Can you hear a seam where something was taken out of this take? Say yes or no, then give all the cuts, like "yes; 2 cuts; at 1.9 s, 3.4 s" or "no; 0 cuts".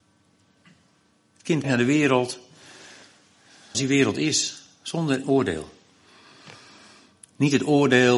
yes; 3 cuts; at 1.6 s, 3.7 s, 5.2 s